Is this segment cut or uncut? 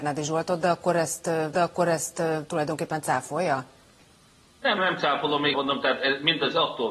cut